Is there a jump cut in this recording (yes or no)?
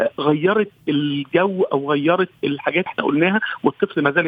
yes